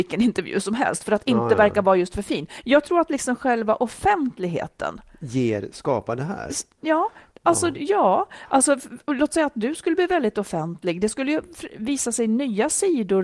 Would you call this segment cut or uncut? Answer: uncut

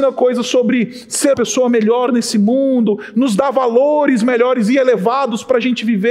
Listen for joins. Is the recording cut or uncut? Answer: cut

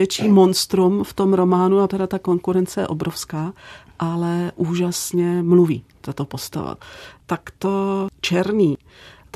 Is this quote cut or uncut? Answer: cut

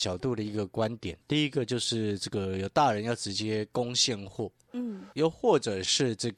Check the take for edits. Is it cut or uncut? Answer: cut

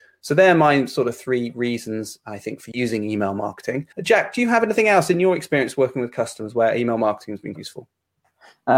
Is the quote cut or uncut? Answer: cut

